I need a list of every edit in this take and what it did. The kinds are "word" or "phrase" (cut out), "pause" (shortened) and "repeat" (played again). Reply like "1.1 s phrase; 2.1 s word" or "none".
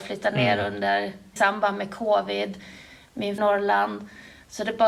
1.4 s word; 3.4 s phrase